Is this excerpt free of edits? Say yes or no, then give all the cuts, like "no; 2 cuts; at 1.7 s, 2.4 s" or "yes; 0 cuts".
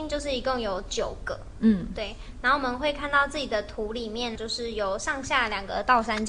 no; 1 cut; at 4.4 s